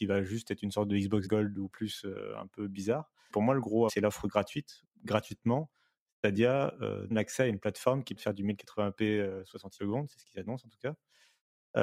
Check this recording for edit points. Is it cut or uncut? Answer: cut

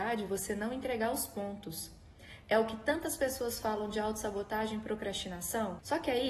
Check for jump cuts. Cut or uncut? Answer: uncut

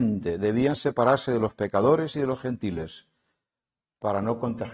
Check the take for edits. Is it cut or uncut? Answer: uncut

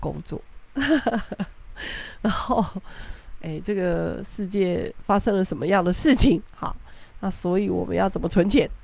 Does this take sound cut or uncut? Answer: uncut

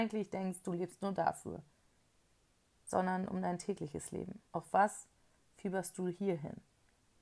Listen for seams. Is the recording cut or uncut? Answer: cut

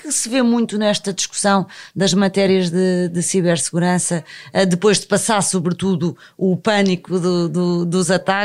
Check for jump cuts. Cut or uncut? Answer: uncut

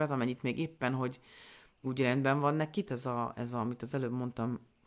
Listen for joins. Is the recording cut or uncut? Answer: cut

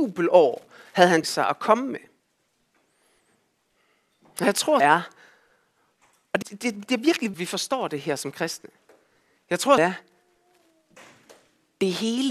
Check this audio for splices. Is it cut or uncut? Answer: cut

